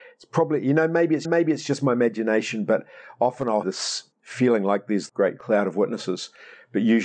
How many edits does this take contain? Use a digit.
4